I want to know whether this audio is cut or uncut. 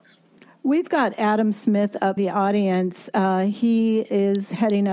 cut